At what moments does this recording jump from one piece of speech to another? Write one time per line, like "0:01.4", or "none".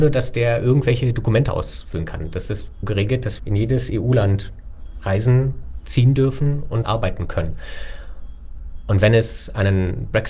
0:02.8
0:03.4
0:06.8